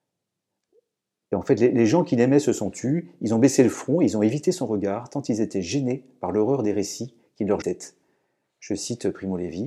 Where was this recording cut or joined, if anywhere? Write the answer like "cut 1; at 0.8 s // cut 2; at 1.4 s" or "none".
cut 1; at 7.6 s